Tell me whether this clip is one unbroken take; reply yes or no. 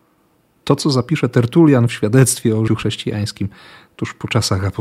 no